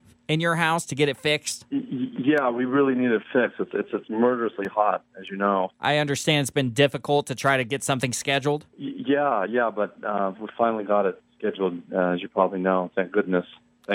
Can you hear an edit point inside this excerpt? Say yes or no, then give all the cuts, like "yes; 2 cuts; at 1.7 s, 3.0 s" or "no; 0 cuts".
no; 0 cuts